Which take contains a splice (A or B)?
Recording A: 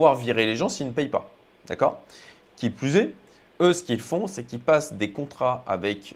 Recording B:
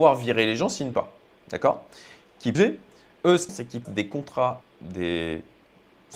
B